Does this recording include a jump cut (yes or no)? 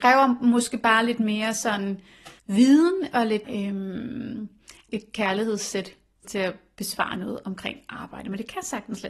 yes